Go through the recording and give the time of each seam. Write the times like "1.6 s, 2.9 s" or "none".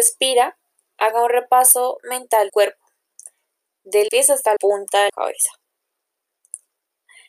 2.5 s, 4.1 s, 4.6 s, 5.1 s

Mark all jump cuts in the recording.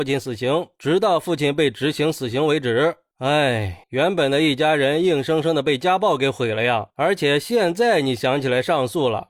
3.8 s

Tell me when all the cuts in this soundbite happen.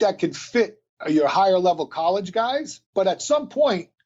2.8 s

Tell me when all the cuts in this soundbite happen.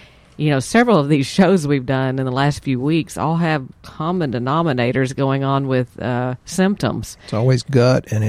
3.7 s

